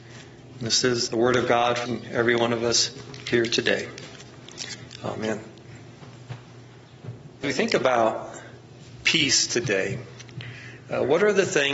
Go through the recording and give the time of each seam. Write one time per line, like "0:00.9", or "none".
0:01.1
0:01.9
0:07.4